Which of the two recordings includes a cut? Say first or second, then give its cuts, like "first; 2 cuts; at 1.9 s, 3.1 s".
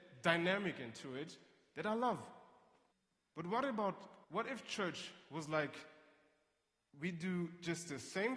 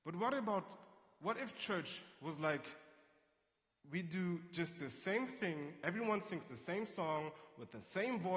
first; 2 cuts; at 2.9 s, 4.2 s